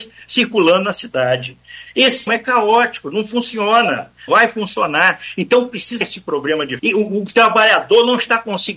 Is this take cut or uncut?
cut